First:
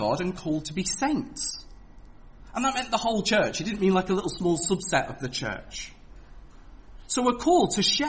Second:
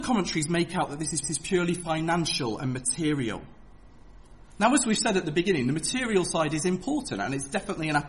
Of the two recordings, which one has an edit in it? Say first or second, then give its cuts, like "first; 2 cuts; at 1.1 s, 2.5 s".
second; 1 cut; at 1.2 s